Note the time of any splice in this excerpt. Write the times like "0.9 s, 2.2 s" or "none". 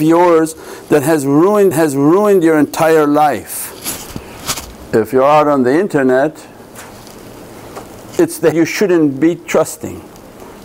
1.7 s, 8.5 s